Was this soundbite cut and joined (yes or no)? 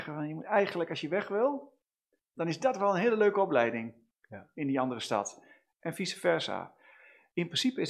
no